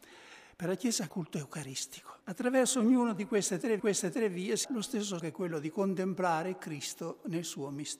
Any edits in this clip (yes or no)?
yes